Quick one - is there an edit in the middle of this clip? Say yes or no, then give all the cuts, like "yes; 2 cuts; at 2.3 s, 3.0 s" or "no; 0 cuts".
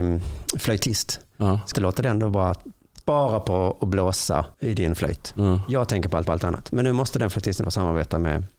yes; 5 cuts; at 1.7 s, 3.0 s, 4.5 s, 6.2 s, 7.6 s